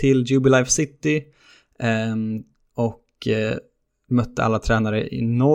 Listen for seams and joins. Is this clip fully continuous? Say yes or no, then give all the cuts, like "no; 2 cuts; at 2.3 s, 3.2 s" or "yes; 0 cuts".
yes; 0 cuts